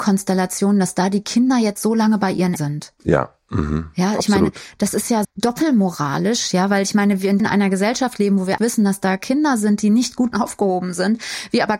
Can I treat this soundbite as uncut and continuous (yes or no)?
no